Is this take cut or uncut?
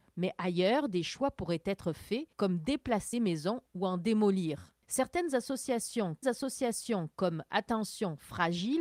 cut